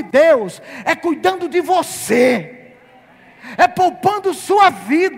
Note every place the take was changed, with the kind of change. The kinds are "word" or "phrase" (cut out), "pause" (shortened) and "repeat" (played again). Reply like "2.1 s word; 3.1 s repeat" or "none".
none